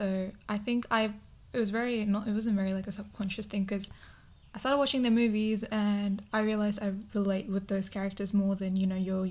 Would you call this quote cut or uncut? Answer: uncut